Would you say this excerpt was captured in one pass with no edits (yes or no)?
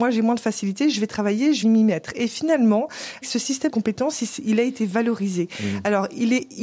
no